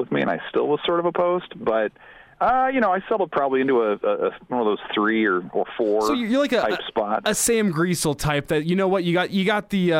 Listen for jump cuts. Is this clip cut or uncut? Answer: uncut